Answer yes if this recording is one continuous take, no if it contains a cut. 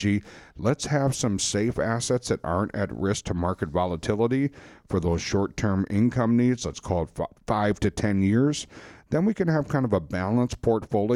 no